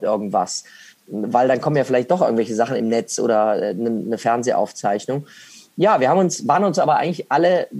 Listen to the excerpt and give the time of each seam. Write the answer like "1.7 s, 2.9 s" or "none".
none